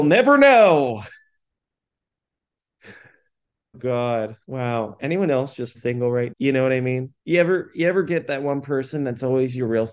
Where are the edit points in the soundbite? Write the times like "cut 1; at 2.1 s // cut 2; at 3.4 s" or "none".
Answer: cut 1; at 3.7 s // cut 2; at 4.4 s // cut 3; at 5.7 s // cut 4; at 6.3 s // cut 5; at 7.2 s